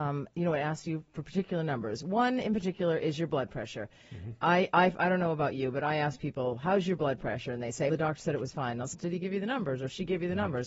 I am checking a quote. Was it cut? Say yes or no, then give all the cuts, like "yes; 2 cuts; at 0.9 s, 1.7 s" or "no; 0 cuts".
yes; 2 cuts; at 7.9 s, 8.9 s